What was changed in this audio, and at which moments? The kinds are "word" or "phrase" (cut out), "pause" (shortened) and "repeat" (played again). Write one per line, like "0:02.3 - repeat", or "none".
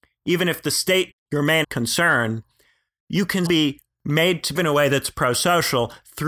0:01.1 - word
0:01.6 - word
0:03.5 - word
0:04.6 - word